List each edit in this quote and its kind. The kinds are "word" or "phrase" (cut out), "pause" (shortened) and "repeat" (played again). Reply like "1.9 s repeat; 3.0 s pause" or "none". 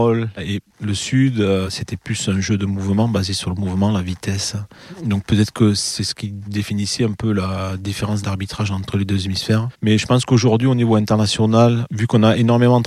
9.7 s pause